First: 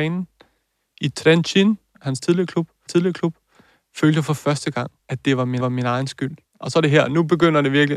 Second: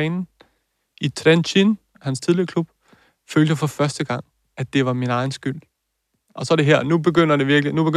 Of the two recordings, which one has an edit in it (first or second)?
first